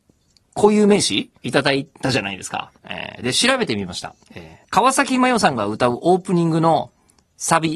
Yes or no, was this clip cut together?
yes